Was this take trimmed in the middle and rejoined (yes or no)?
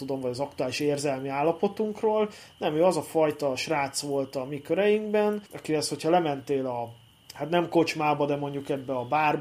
yes